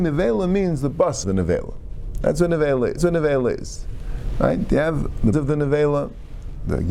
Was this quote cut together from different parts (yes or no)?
yes